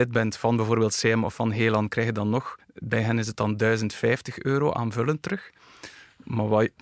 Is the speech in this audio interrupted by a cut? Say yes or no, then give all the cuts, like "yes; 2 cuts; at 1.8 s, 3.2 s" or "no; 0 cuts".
yes; 1 cut; at 2.6 s